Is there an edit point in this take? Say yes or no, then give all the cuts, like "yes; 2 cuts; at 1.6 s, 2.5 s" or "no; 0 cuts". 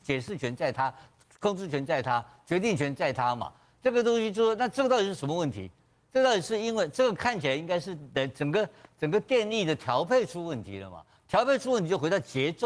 no; 0 cuts